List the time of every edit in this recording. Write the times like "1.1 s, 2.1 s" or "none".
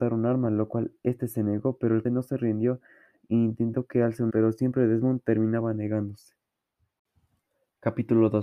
2.0 s, 4.3 s